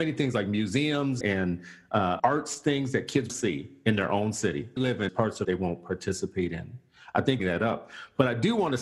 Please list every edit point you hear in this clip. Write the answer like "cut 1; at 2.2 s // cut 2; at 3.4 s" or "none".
cut 1; at 1.2 s // cut 2; at 2.2 s // cut 3; at 3.3 s // cut 4; at 4.8 s // cut 5; at 5.1 s // cut 6; at 5.4 s // cut 7; at 7.4 s

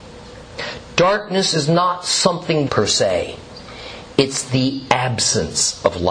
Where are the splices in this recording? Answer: cut 1; at 2.7 s

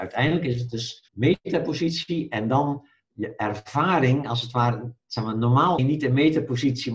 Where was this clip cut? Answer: cut 1; at 1.1 s // cut 2; at 5.8 s

